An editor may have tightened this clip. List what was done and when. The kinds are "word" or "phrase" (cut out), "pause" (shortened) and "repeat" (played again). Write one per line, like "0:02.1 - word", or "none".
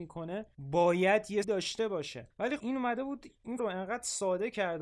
0:01.4 - word
0:02.6 - word
0:03.6 - word